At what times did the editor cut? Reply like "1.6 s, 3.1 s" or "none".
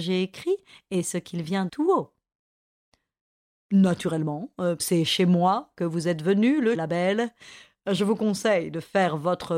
1.7 s, 4.8 s, 6.7 s